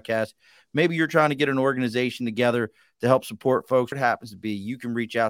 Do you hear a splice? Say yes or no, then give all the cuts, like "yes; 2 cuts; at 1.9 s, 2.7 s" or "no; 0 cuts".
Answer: yes; 1 cut; at 3.9 s